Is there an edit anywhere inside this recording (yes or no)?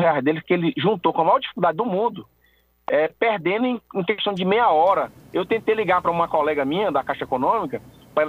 no